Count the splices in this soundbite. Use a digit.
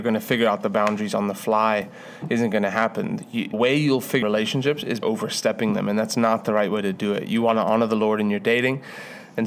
3